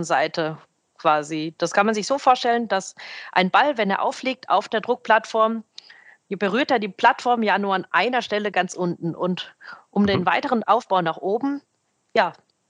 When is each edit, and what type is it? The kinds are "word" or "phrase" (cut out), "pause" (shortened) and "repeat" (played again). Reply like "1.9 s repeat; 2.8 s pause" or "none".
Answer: none